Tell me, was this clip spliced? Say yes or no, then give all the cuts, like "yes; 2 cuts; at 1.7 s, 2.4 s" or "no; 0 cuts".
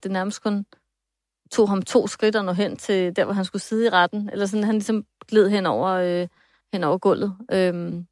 no; 0 cuts